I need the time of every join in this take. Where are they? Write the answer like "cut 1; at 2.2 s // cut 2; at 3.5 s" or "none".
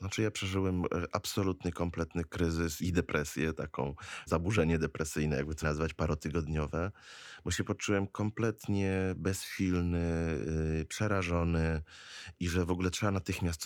cut 1; at 2.8 s // cut 2; at 4.3 s // cut 3; at 5.6 s